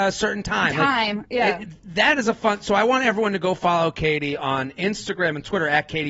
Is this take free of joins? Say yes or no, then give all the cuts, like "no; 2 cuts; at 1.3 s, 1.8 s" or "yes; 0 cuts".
yes; 0 cuts